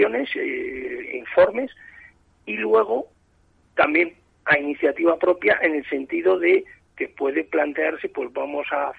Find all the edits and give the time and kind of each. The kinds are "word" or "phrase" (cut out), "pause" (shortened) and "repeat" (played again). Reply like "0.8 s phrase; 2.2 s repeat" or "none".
none